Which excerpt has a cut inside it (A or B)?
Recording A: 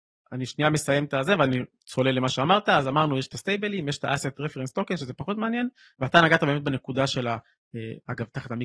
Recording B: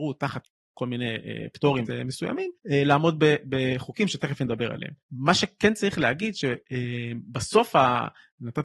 B